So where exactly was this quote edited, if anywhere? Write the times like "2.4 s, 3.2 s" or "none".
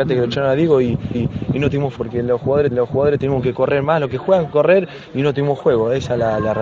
1.1 s, 2.0 s, 2.7 s, 4.5 s